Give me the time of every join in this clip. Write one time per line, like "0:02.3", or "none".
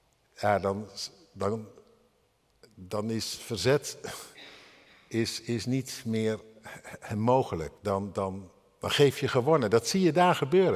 0:07.8